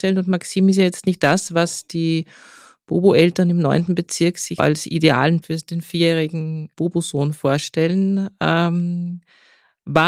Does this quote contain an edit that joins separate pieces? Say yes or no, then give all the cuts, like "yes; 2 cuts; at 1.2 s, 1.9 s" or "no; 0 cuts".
yes; 3 cuts; at 1.2 s, 4.6 s, 5.4 s